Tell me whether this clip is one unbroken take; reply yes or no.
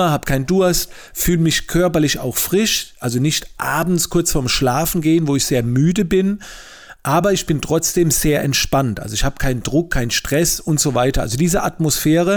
yes